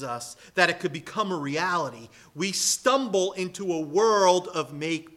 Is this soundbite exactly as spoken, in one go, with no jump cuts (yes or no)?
yes